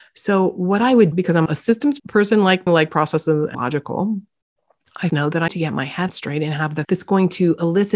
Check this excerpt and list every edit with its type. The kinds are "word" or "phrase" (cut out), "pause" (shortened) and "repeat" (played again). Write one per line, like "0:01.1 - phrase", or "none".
0:01.1 - word
0:01.5 - word
0:02.0 - word
0:02.7 - word
0:03.5 - word
0:05.1 - word
0:05.5 - word
0:06.1 - word
0:06.8 - word